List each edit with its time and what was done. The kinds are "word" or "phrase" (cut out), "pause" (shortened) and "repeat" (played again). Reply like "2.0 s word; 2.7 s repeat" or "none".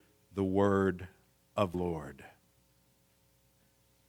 1.7 s word